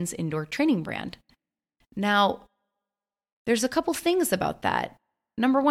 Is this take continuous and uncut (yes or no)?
yes